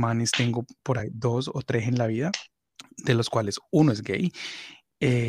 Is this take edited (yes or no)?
no